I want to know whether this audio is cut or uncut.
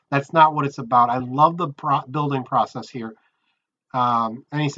uncut